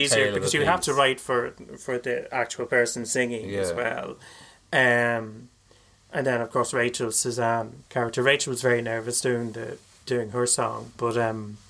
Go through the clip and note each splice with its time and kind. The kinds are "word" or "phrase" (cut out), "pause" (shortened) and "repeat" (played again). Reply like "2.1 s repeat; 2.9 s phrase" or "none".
7.9 s pause